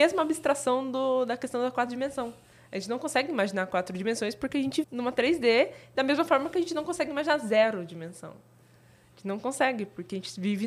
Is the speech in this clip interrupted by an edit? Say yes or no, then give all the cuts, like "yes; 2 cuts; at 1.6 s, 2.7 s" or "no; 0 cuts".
yes; 1 cut; at 4.8 s